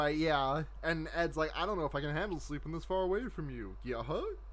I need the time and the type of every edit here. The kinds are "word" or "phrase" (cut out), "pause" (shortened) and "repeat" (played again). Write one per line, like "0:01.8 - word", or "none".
none

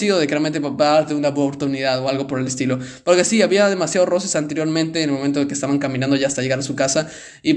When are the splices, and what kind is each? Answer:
none

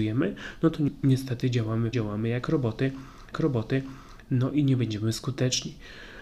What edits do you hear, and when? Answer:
0:01.9 - word
0:03.3 - repeat

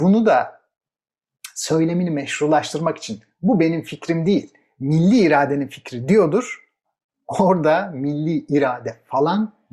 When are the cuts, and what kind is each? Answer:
none

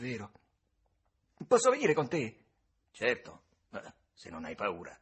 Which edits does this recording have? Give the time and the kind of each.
none

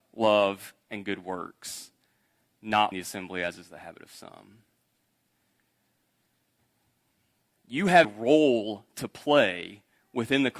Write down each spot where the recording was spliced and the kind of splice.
0:02.9 - word
0:08.0 - word

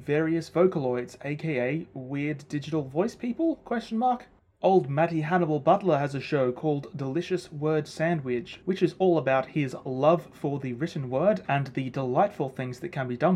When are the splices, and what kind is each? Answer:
none

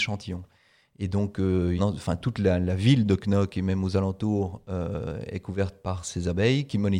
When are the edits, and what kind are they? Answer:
0:01.8 - phrase

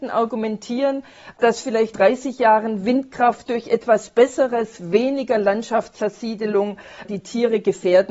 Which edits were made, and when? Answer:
0:01.9 - word
0:07.0 - phrase

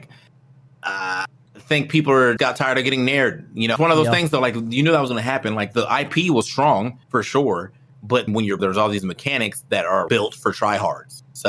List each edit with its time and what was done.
0:02.4 - word
0:03.8 - phrase
0:07.0 - pause
0:08.3 - word
0:08.6 - phrase
0:10.1 - word

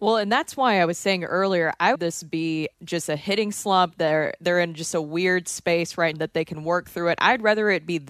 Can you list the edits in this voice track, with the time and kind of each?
0:01.9 - phrase
0:02.7 - pause
0:06.1 - word

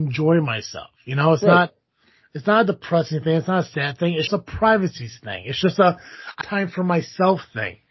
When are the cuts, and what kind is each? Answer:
0:04.3 - word
0:06.4 - word

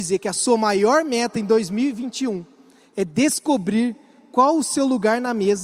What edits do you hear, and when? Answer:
none

